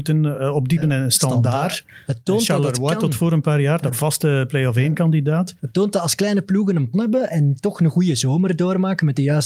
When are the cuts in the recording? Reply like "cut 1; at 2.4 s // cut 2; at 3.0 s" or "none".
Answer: cut 1; at 3.9 s // cut 2; at 5.6 s // cut 3; at 6.9 s // cut 4; at 7.3 s